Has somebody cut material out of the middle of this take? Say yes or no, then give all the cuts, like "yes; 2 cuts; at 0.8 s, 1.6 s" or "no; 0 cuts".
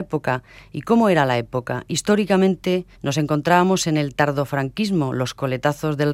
yes; 1 cut; at 2.9 s